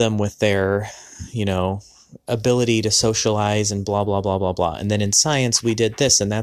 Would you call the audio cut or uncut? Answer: uncut